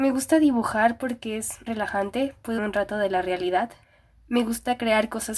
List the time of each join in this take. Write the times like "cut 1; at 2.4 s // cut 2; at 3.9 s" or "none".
cut 1; at 1.7 s // cut 2; at 2.6 s // cut 3; at 3.8 s